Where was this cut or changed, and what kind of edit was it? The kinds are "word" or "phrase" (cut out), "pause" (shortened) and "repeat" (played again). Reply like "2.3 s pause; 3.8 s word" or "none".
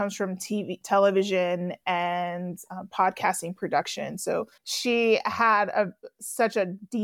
4.6 s pause